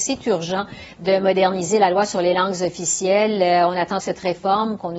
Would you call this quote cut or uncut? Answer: cut